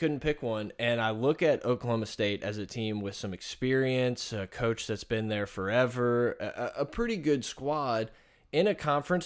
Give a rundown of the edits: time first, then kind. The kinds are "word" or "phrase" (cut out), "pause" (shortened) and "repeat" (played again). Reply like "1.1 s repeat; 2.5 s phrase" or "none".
none